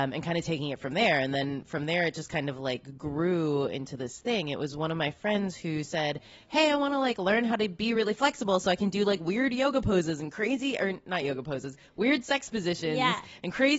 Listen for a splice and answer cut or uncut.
uncut